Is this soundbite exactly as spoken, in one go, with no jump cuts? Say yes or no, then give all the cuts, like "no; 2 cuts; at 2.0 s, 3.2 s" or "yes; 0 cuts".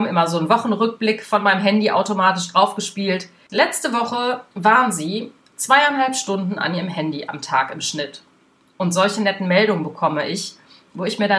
yes; 0 cuts